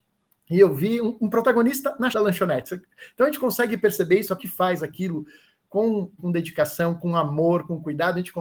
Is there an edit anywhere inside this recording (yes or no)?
yes